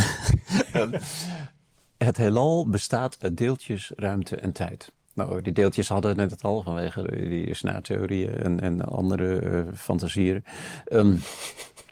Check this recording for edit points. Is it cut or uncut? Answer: uncut